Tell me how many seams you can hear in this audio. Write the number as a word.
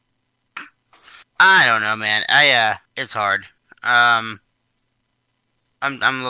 two